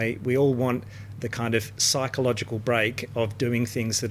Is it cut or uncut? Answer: uncut